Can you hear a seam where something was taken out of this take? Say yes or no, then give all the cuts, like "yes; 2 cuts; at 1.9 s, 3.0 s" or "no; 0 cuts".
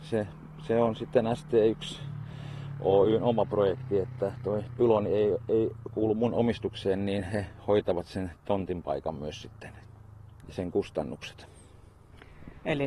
no; 0 cuts